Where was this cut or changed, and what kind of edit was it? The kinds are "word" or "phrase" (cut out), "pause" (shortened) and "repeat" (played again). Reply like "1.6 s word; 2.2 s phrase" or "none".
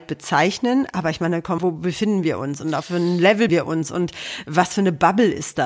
1.6 s word; 2.8 s word; 3.5 s word